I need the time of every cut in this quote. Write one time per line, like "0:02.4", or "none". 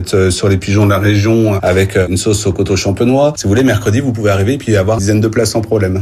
0:05.0